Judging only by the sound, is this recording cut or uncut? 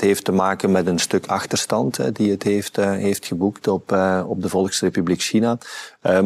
uncut